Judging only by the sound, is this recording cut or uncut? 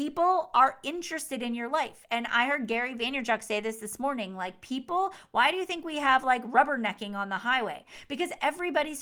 uncut